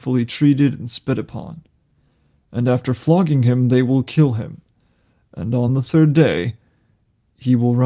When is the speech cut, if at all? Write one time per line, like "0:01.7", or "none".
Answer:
none

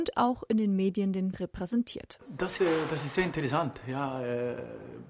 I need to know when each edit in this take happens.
0:01.3
0:02.6

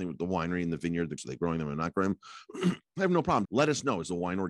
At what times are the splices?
0:01.2
0:03.4

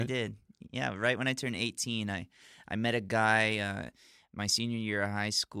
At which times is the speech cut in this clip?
none

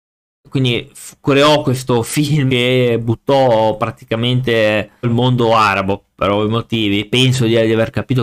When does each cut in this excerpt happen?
0:02.5
0:05.0

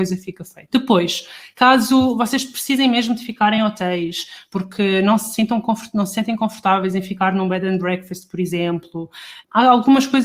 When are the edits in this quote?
none

